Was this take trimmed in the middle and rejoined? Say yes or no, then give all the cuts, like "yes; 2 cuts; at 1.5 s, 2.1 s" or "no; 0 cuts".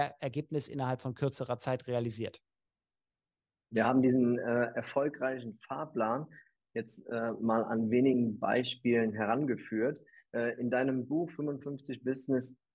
no; 0 cuts